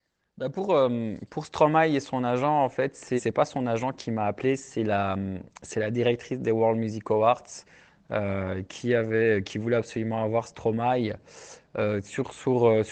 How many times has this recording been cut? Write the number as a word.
two